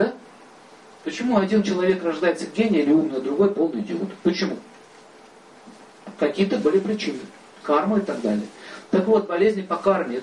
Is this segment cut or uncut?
uncut